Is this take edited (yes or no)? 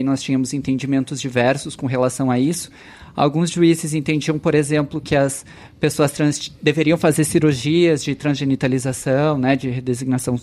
no